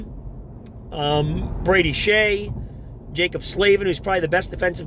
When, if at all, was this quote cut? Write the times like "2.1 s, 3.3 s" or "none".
none